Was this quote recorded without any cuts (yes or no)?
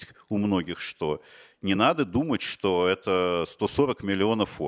yes